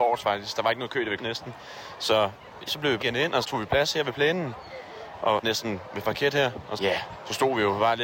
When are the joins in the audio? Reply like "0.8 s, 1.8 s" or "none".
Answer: 1.2 s, 2.7 s, 3.0 s, 3.4 s, 5.4 s, 6.0 s, 6.8 s

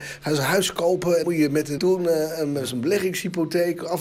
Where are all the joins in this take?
1.2 s, 1.8 s

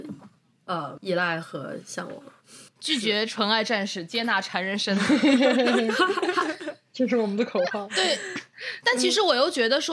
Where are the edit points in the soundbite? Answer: 1.0 s, 2.7 s

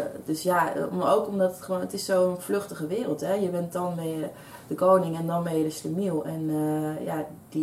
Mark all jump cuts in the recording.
none

